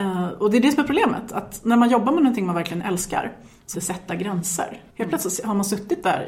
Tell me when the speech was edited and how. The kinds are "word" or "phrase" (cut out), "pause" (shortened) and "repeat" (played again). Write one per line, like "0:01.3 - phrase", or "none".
0:03.7 - phrase
0:04.9 - pause